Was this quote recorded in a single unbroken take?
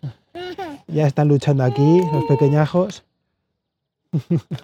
yes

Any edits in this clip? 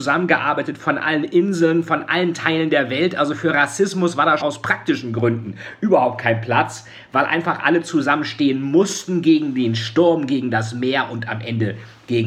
yes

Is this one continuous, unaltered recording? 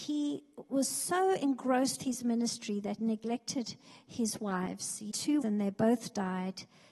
no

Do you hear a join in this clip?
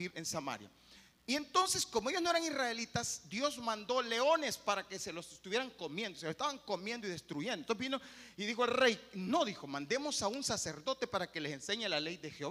no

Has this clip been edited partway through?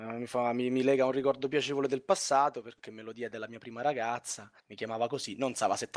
yes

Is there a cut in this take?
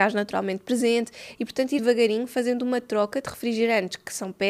yes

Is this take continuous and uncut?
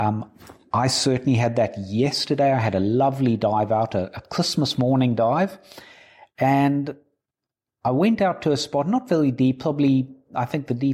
yes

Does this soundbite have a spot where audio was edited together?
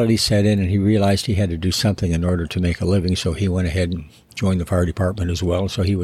no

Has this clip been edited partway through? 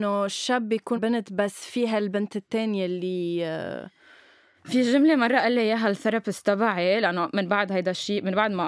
yes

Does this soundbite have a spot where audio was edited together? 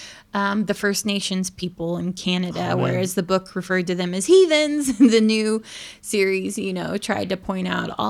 no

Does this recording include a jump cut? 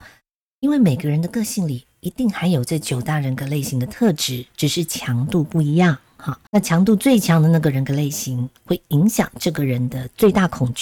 yes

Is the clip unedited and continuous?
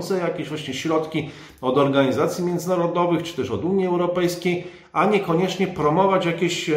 yes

